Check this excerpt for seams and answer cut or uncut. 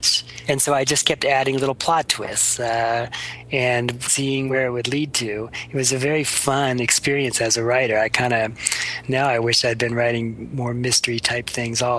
cut